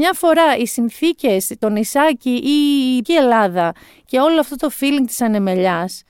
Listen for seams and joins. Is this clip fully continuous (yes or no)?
no